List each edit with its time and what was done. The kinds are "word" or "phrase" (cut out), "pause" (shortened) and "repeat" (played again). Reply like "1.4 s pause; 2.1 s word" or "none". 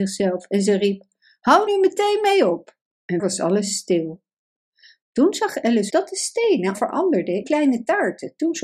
1.7 s word; 3.2 s word; 5.9 s word; 6.7 s word; 7.4 s word

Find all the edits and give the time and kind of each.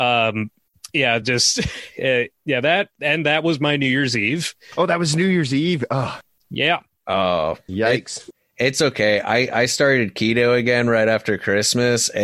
none

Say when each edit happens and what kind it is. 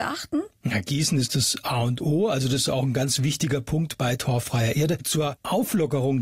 none

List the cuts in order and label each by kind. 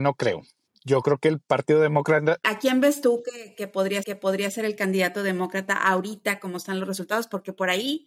4.0 s repeat

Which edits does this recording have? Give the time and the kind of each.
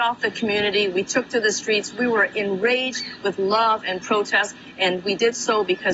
none

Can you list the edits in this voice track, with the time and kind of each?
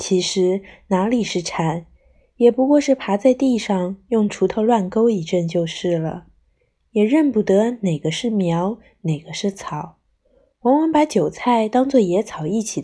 none

